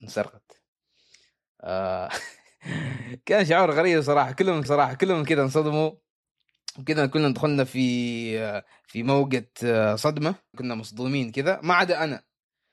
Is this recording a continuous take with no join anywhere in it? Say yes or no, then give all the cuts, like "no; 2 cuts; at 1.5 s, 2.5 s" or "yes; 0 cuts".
no; 3 cuts; at 4.6 s, 8.7 s, 10.5 s